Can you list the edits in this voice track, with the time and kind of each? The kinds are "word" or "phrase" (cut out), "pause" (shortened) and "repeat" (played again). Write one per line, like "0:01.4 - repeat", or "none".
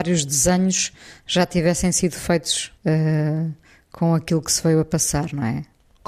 0:02.8 - pause

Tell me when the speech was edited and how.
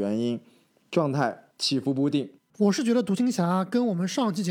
0:01.5 - pause
0:02.4 - pause

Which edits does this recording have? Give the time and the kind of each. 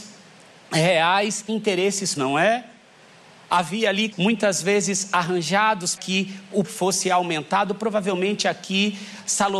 0:01.5 - word
0:02.2 - word
0:04.1 - word
0:06.0 - word
0:06.6 - word

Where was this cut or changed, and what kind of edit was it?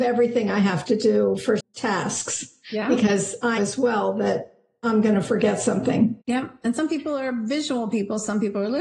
0:01.6 - word
0:03.6 - word
0:06.2 - pause

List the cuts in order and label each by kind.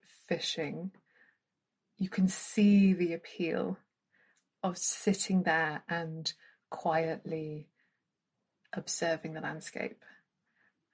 none

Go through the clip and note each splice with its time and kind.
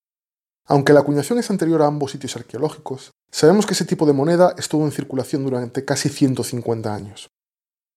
0:03.2 - pause

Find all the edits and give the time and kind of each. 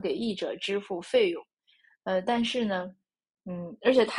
none

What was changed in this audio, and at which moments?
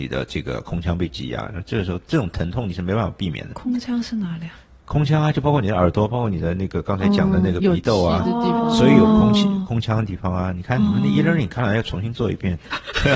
none

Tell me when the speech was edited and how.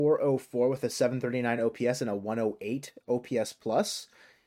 none

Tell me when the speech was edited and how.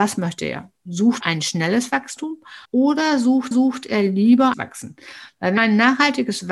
0:01.2 - word
0:02.6 - pause
0:03.5 - repeat
0:04.5 - phrase
0:05.6 - word

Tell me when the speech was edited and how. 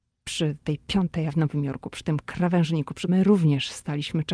0:01.3 - word
0:03.1 - word

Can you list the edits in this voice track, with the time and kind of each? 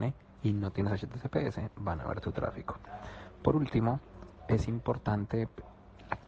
none

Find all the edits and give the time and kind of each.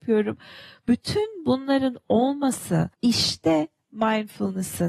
0:02.9 - pause

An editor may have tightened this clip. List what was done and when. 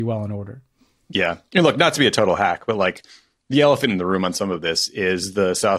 none

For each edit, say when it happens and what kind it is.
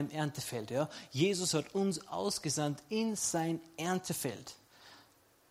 none

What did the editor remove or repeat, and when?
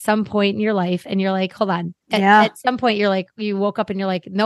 0:02.0 - pause

